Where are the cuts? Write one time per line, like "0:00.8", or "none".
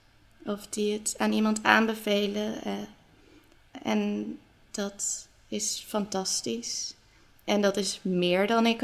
none